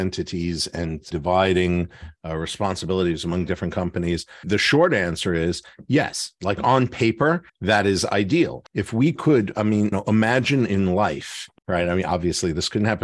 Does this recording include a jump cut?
yes; 6 cuts; at 1.1 s, 4.4 s, 7.5 s, 8.7 s, 9.9 s, 11.6 s

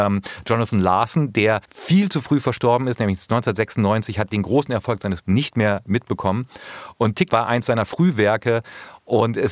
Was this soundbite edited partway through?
yes; 3 cuts; at 1.6 s, 5.2 s, 7.3 s

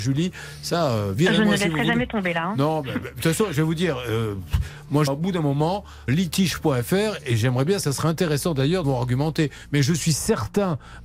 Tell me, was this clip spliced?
yes; 4 cuts; at 5.1 s, 6.1 s, 7.8 s, 8.8 s

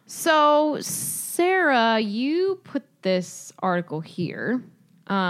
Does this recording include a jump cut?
no; 0 cuts

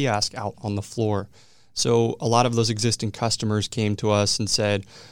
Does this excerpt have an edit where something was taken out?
no; 0 cuts

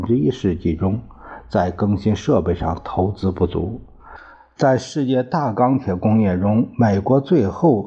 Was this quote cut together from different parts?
no; 0 cuts

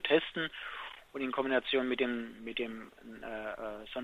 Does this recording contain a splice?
no; 0 cuts

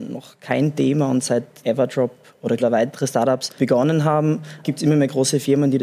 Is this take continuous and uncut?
no; 4 cuts; at 1.6 s, 2.6 s, 3.6 s, 4.6 s

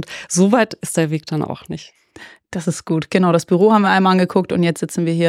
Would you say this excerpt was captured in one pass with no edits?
yes; 0 cuts

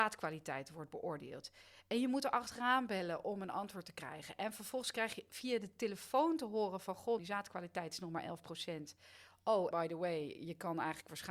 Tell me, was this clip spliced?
yes; 2 cuts; at 7.2 s, 9.7 s

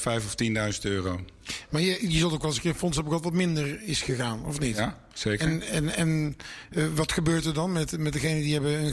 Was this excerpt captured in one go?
yes; 0 cuts

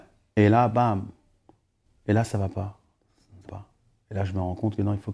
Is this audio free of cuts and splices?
no; 1 cut; at 3.5 s

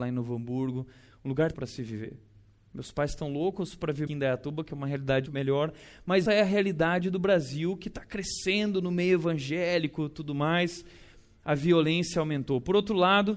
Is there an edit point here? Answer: yes; 4 cuts; at 1.5 s, 4.1 s, 5.3 s, 6.3 s

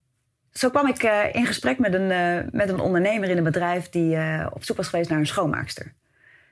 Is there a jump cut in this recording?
no; 0 cuts

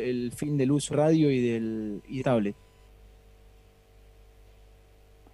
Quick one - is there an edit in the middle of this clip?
yes; 2 cuts; at 0.9 s, 2.2 s

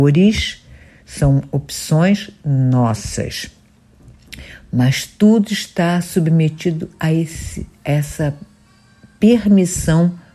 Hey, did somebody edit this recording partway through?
no; 0 cuts

